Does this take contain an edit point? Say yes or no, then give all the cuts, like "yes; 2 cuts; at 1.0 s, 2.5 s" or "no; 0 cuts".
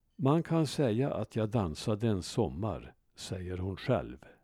no; 0 cuts